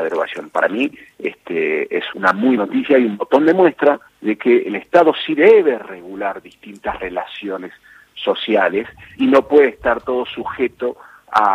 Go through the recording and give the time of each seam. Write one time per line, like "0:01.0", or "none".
0:02.1
0:02.6
0:04.1
0:09.2

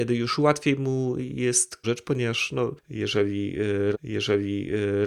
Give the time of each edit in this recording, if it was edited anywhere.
0:01.8
0:03.9

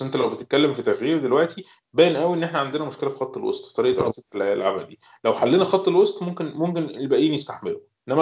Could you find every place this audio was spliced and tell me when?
none

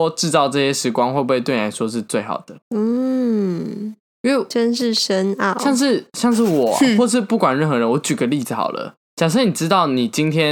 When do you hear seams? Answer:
0:02.6

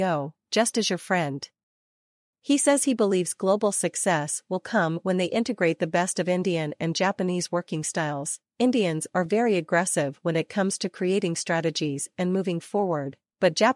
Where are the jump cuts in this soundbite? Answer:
none

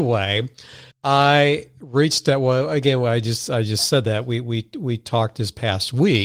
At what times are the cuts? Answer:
0:00.9

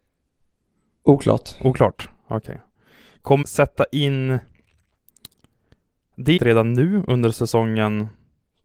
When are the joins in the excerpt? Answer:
0:03.4
0:06.4

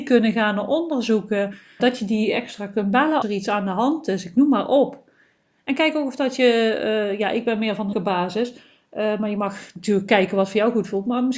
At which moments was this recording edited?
0:01.8
0:03.2
0:07.9

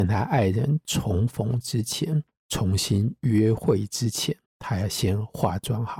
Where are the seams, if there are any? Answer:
0:04.5

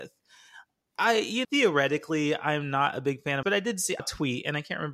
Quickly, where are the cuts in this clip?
0:01.4
0:03.4
0:04.0

